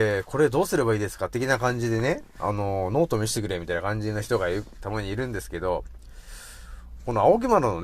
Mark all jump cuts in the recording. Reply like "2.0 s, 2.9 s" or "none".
none